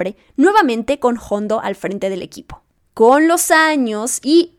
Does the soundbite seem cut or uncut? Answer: uncut